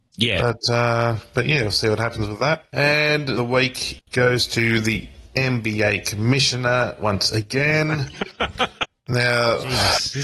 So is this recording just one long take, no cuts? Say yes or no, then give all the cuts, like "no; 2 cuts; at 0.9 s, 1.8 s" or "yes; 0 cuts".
no; 1 cut; at 3.3 s